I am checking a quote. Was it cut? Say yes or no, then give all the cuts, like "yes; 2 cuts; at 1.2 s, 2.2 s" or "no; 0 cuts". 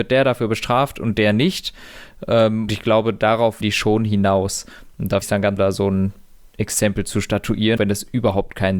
yes; 5 cuts; at 2.7 s, 3.6 s, 5.2 s, 5.6 s, 7.8 s